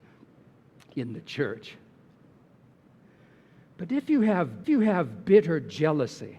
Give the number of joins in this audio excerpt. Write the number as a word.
one